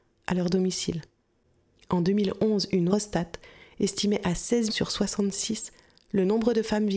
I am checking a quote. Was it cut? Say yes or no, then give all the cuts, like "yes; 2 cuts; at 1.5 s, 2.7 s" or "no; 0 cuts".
yes; 2 cuts; at 2.9 s, 4.7 s